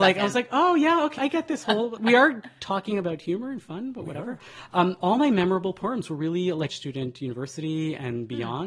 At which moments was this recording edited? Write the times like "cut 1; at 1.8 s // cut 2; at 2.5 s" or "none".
cut 1; at 1.2 s // cut 2; at 2.0 s // cut 3; at 6.7 s